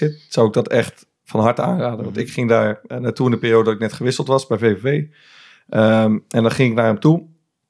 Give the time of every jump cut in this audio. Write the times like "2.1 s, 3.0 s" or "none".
none